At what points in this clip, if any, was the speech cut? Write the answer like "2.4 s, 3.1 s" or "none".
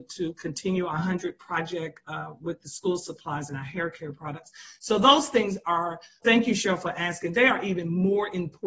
6.2 s